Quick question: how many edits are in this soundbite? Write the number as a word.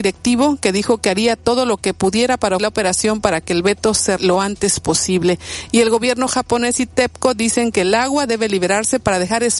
two